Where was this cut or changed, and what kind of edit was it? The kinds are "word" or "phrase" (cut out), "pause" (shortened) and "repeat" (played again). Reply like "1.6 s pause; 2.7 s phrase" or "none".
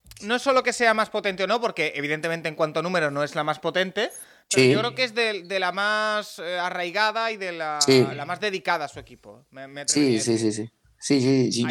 none